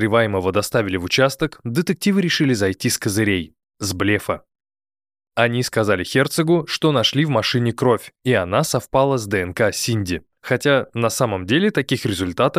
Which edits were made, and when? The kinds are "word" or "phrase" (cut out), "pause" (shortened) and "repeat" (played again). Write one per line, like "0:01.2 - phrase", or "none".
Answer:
none